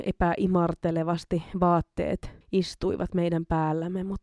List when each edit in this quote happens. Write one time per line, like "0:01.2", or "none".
0:02.4